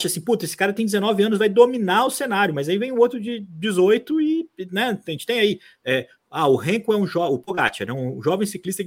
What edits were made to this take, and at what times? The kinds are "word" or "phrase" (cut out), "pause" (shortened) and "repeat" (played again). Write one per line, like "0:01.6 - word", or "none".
none